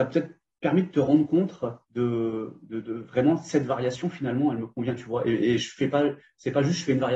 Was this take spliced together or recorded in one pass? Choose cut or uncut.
cut